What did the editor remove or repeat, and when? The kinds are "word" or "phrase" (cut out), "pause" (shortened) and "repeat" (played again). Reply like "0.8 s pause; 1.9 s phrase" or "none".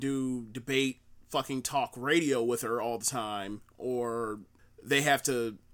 none